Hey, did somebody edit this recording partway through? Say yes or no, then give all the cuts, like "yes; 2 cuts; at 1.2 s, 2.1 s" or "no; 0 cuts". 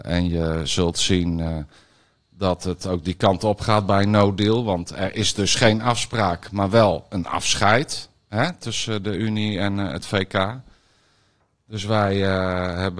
no; 0 cuts